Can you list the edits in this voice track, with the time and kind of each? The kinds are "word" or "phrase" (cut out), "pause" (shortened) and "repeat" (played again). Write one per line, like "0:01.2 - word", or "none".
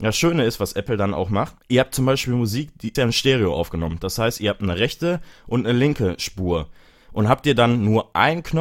0:01.6 - pause
0:02.9 - phrase